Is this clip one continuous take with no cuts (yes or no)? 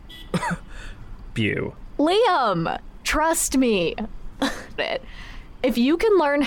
no